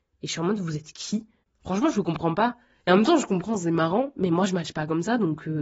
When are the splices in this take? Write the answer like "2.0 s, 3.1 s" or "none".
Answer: none